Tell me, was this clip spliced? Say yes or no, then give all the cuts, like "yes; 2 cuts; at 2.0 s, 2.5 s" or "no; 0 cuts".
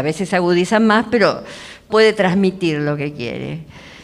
yes; 1 cut; at 1.9 s